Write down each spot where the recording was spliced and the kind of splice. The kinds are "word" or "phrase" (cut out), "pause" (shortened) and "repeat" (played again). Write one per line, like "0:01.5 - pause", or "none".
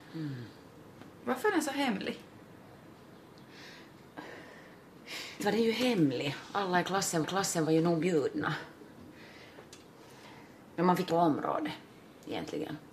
0:05.4 - word
0:07.2 - repeat
0:11.1 - phrase